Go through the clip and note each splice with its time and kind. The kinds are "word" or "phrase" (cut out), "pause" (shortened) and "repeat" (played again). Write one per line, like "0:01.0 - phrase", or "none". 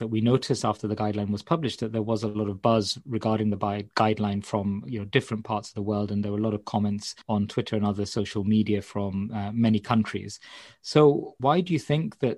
0:07.2 - pause
0:11.4 - word